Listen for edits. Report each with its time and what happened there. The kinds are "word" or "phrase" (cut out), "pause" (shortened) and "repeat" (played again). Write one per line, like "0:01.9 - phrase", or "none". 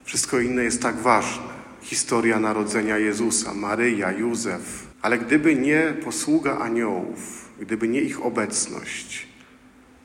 0:04.9 - pause